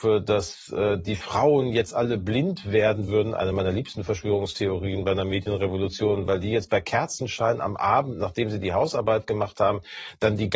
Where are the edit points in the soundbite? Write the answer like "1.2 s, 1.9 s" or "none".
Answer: none